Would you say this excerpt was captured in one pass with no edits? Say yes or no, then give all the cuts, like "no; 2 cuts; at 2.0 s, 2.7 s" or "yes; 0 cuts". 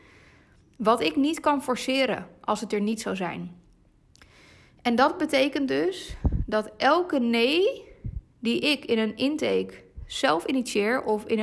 no; 1 cut; at 8.3 s